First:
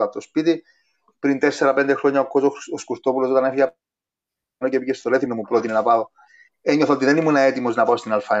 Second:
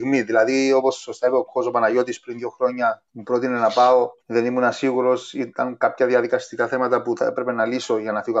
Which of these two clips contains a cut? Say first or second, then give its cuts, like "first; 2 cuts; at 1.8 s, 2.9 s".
second; 2 cuts; at 3.1 s, 4.2 s